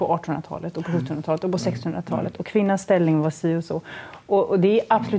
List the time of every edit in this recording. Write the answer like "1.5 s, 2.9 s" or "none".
none